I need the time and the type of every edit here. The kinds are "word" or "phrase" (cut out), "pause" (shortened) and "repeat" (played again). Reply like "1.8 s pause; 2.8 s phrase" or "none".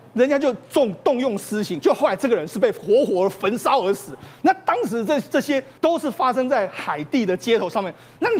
5.8 s pause